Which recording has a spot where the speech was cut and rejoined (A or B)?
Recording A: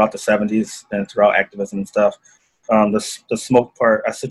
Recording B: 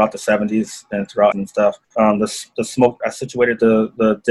B